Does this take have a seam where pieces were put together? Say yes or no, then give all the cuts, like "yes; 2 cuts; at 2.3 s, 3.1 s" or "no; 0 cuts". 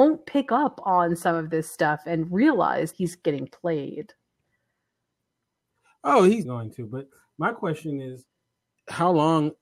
yes; 2 cuts; at 2.9 s, 6.4 s